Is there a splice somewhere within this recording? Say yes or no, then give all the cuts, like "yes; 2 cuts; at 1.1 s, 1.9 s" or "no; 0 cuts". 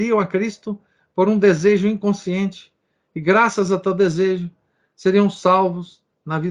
no; 0 cuts